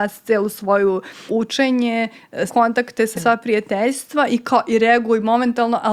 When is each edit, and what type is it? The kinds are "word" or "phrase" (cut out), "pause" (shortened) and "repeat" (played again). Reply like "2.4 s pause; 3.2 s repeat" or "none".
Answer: 1.3 s word; 2.5 s word; 3.1 s word